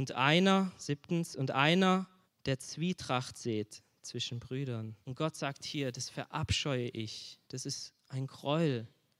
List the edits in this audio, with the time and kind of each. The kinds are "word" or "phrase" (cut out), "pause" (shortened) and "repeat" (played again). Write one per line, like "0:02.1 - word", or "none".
0:02.2 - pause
0:05.0 - pause
0:07.4 - pause

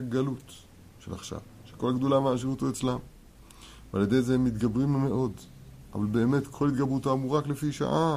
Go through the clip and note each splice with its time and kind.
none

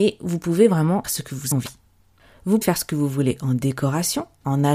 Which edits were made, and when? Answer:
0:01.0 - word
0:01.5 - word
0:02.6 - word

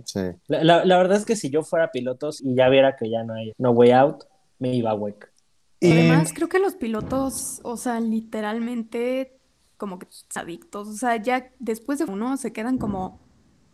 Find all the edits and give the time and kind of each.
0:02.4 - word
0:03.5 - word
0:05.9 - word
0:10.4 - word
0:12.1 - word

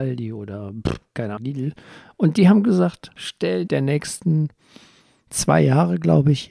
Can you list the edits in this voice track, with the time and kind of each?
0:01.4 - word
0:03.2 - word
0:03.7 - word

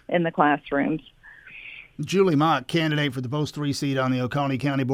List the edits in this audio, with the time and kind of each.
none

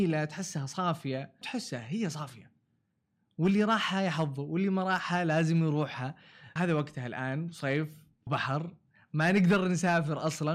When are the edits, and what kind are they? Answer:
0:01.4 - word
0:06.6 - word
0:08.3 - word

